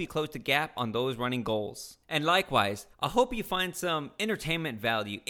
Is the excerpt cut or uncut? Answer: cut